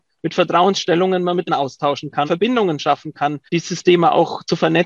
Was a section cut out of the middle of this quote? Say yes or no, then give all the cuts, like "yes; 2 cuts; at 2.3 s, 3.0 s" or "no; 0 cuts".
yes; 3 cuts; at 1.5 s, 2.3 s, 3.5 s